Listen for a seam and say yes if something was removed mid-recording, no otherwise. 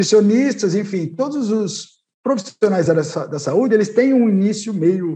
no